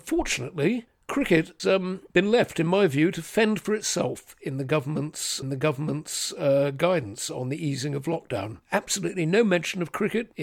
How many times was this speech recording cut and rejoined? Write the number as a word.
four